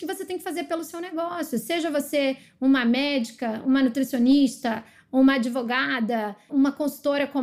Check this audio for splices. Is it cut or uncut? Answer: uncut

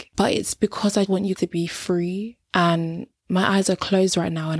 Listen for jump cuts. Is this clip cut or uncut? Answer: cut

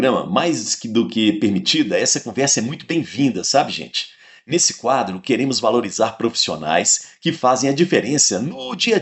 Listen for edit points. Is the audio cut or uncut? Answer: uncut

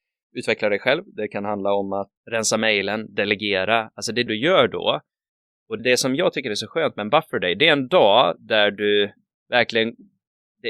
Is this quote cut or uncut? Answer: cut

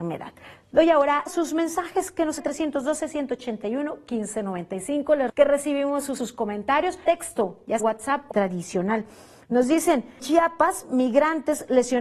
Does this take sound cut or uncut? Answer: cut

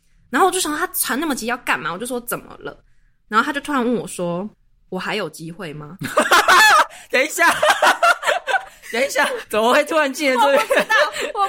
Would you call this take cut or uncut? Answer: cut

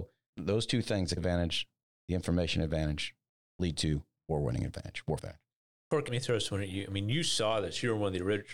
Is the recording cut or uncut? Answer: cut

